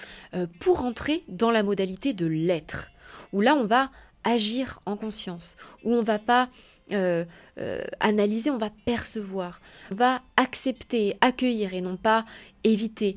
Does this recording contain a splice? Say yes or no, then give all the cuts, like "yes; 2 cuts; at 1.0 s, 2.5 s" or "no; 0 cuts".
yes; 1 cut; at 9.9 s